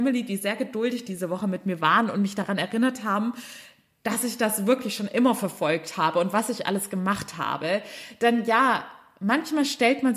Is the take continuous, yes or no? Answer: yes